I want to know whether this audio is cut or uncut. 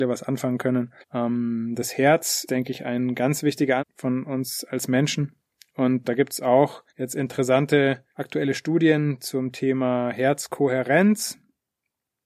cut